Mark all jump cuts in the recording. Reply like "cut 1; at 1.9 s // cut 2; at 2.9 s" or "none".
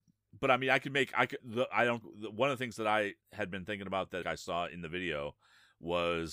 cut 1; at 1.4 s // cut 2; at 2.0 s // cut 3; at 3.2 s // cut 4; at 4.2 s